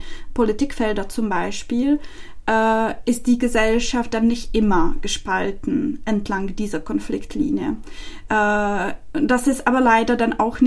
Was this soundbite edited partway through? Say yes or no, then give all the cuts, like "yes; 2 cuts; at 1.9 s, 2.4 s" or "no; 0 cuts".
no; 0 cuts